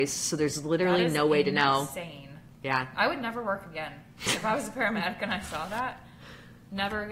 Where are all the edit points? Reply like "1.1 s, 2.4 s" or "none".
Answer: 2.5 s